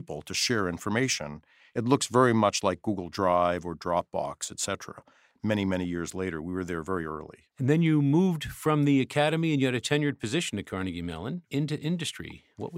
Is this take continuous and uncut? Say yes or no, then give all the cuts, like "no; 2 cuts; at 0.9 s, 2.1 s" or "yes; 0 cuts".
no; 1 cut; at 7.5 s